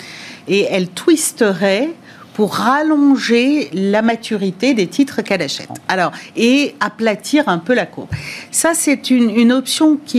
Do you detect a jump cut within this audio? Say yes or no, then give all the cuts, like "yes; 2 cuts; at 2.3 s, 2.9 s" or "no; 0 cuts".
no; 0 cuts